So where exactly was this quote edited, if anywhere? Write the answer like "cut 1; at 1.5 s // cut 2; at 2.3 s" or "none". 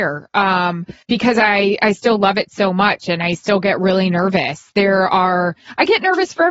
cut 1; at 1.0 s